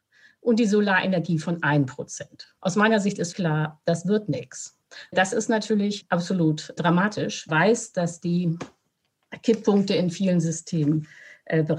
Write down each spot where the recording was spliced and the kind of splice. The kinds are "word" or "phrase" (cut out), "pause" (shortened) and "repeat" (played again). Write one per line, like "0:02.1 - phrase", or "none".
0:02.6 - pause
0:03.3 - word
0:07.5 - phrase